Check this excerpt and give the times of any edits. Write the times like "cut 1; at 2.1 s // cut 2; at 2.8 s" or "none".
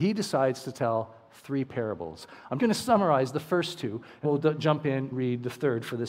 cut 1; at 2.6 s // cut 2; at 4.2 s // cut 3; at 5.1 s